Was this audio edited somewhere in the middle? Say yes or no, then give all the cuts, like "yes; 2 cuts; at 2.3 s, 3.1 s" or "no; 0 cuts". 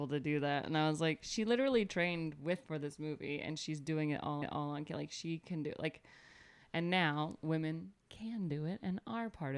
yes; 2 cuts; at 2.6 s, 4.4 s